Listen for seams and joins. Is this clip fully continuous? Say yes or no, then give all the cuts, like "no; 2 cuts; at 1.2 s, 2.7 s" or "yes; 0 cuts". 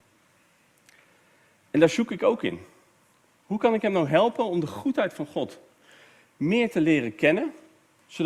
yes; 0 cuts